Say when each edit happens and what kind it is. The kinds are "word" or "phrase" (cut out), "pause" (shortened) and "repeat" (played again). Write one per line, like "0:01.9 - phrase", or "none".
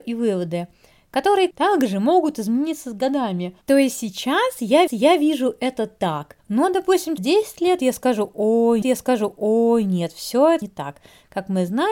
0:01.5 - word
0:03.6 - pause
0:04.9 - repeat
0:06.4 - pause
0:07.2 - word
0:08.8 - repeat
0:10.6 - word